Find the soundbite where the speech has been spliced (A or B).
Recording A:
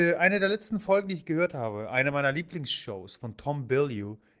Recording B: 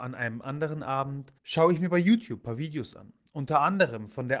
B